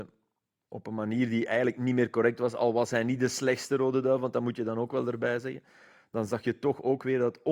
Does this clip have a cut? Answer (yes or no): no